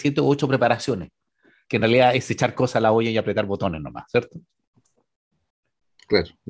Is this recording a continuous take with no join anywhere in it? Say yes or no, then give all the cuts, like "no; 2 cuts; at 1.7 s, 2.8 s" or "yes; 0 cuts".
yes; 0 cuts